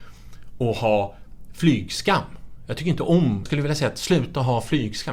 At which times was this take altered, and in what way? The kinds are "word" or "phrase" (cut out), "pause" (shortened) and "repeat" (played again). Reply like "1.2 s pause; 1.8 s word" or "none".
3.5 s word